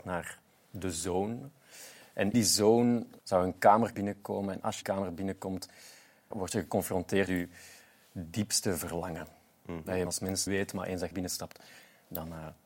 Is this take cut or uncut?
cut